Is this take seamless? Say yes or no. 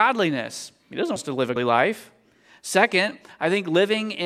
no